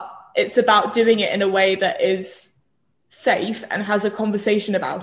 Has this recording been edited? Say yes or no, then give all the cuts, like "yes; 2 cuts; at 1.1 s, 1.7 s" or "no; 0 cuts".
no; 0 cuts